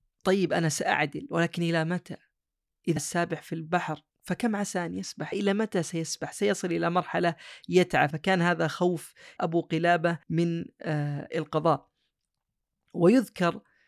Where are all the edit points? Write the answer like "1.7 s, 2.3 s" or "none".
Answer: 3.0 s, 4.1 s, 5.3 s, 8.1 s, 9.4 s, 10.2 s